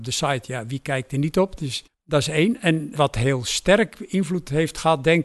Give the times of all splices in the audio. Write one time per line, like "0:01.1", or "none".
0:01.1
0:01.9
0:02.9